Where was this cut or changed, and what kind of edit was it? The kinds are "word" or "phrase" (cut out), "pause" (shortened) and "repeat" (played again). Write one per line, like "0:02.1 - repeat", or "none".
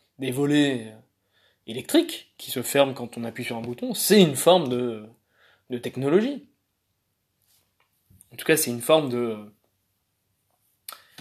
none

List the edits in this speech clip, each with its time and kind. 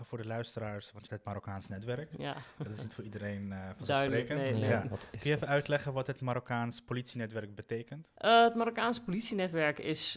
0:01.1 - word
0:08.2 - pause

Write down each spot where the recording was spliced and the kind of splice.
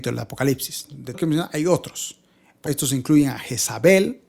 0:01.1 - word
0:02.7 - word

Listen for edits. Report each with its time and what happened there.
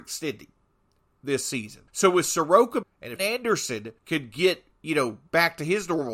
0:01.9 - pause
0:02.8 - word
0:03.2 - word
0:04.0 - pause

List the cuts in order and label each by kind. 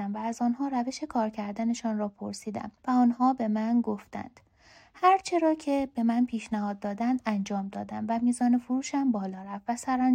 0:02.8 - pause

